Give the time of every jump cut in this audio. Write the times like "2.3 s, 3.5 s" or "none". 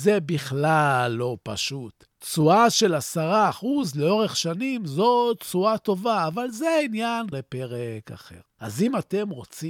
7.3 s